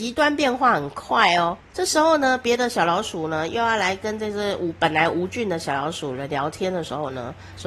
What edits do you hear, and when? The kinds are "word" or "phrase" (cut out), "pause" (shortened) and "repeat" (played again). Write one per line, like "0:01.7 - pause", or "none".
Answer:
0:01.6 - pause